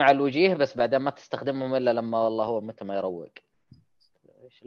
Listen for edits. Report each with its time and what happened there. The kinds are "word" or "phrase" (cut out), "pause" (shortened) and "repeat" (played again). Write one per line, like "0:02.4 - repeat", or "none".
none

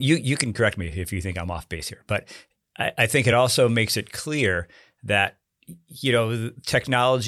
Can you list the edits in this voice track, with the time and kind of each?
none

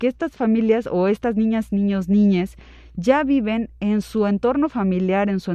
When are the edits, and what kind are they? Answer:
none

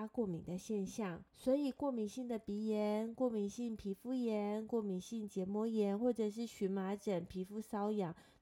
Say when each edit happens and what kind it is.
0:01.3 - pause

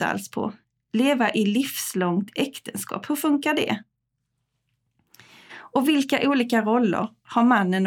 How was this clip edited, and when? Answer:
none

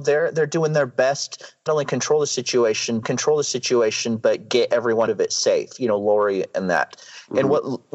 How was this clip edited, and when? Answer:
0:01.7 - word
0:03.0 - repeat
0:05.1 - word

